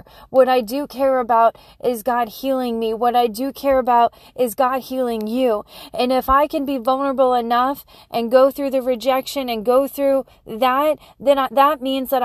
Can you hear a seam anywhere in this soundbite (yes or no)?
no